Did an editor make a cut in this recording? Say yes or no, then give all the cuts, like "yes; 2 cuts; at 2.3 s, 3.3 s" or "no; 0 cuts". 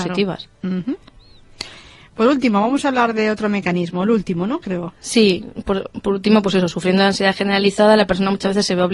no; 0 cuts